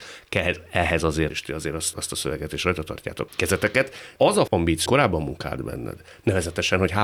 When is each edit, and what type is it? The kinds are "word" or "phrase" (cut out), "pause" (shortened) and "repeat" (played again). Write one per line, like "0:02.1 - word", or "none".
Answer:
0:01.3 - word
0:01.9 - word
0:03.3 - word
0:04.2 - word
0:04.5 - word
0:04.9 - word